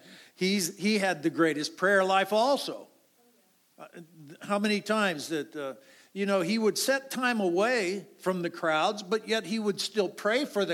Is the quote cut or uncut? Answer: uncut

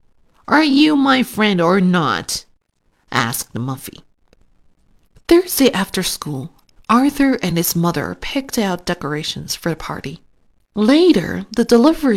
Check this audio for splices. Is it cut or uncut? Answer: uncut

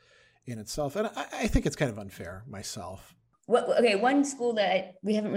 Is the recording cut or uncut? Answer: uncut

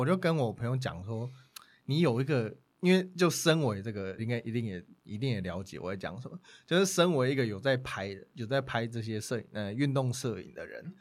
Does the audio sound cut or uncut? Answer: cut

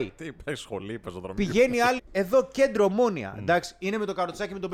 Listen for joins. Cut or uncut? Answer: cut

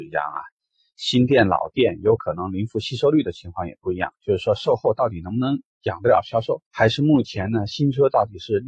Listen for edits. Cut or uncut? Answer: cut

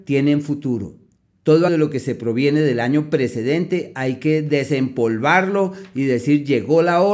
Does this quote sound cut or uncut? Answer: cut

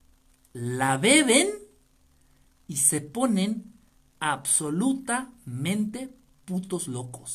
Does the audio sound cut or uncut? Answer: uncut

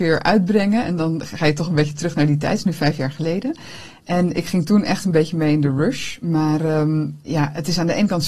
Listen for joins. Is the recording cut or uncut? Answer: uncut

